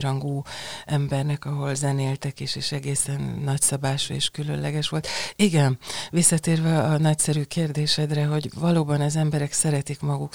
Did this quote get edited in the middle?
no; 0 cuts

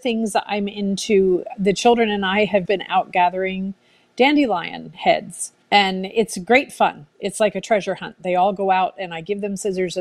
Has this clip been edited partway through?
yes; 2 cuts; at 2.7 s, 5.6 s

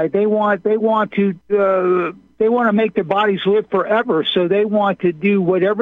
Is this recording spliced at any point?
yes; 1 cut; at 1.4 s

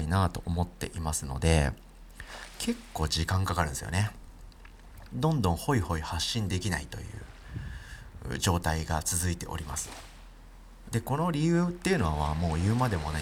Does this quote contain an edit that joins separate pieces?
yes; 1 cut; at 10.9 s

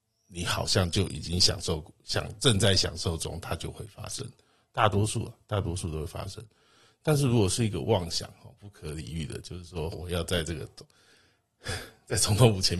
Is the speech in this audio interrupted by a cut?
yes; 1 cut; at 9.9 s

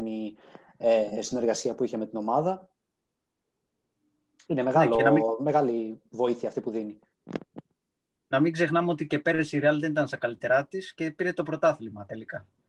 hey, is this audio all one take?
yes; 0 cuts

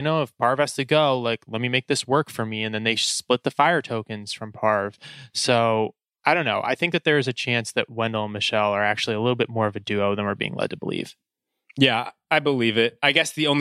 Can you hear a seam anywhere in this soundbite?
no; 0 cuts

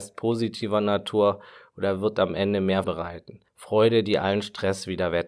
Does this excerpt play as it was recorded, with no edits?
no; 2 cuts; at 2.8 s, 3.5 s

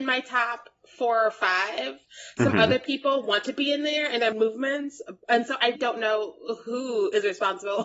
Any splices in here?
yes; 2 cuts; at 4.3 s, 5.7 s

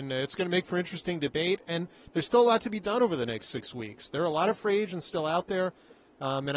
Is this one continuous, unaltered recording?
yes; 0 cuts

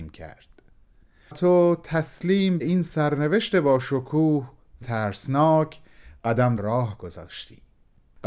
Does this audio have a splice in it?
yes; 3 cuts; at 1.3 s, 4.8 s, 6.6 s

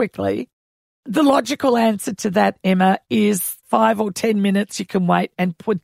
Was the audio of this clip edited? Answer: yes; 1 cut; at 3.6 s

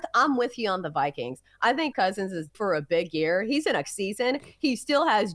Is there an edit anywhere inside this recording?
yes; 3 cuts; at 1.9 s, 2.5 s, 3.8 s

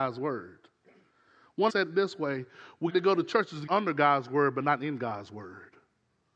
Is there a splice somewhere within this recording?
yes; 3 cuts; at 1.7 s, 2.9 s, 3.7 s

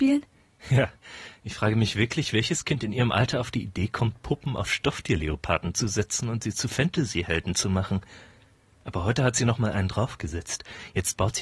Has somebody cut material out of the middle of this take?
no; 0 cuts

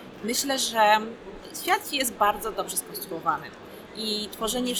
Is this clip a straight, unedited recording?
yes; 0 cuts

